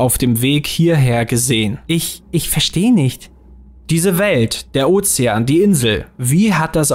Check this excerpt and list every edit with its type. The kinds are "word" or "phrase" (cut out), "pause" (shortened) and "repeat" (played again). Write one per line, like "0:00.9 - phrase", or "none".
0:01.8 - pause